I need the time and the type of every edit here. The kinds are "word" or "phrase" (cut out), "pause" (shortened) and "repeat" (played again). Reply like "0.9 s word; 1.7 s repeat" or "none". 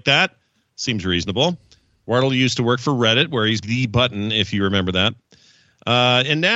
3.6 s word